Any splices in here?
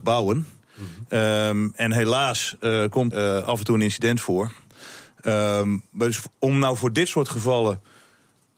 yes; 1 cut; at 3.1 s

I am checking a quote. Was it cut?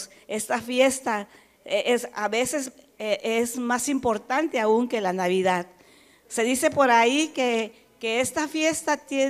no; 0 cuts

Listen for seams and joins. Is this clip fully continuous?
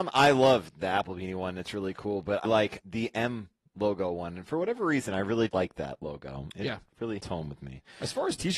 no; 4 cuts; at 2.4 s, 2.8 s, 5.5 s, 7.2 s

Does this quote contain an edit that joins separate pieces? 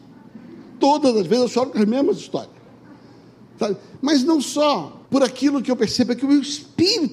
yes; 1 cut; at 5.1 s

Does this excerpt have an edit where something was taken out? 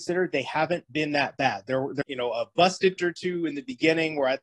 yes; 2 cuts; at 2.0 s, 3.0 s

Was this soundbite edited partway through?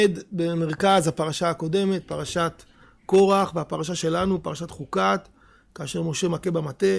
no; 0 cuts

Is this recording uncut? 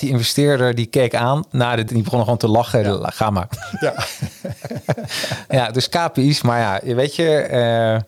no; 1 cut; at 1.9 s

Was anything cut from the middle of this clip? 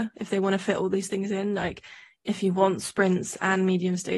no; 0 cuts

